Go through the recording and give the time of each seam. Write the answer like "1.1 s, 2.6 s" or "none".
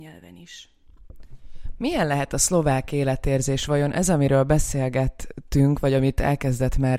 none